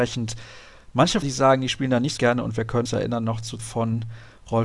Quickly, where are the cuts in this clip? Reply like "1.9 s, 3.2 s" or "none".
1.2 s, 2.2 s, 2.9 s, 3.6 s